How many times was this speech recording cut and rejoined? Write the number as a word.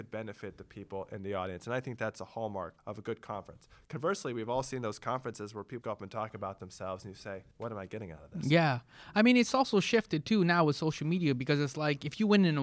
three